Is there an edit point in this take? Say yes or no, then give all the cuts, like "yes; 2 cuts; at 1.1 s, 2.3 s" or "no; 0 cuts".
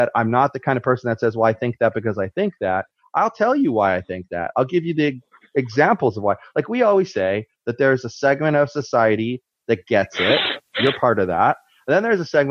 no; 0 cuts